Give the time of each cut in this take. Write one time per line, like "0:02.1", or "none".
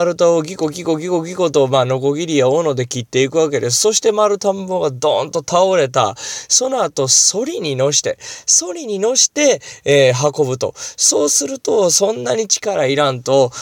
none